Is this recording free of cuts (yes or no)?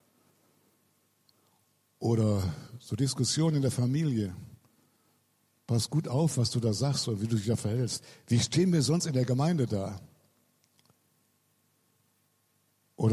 yes